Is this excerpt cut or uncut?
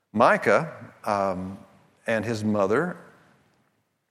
uncut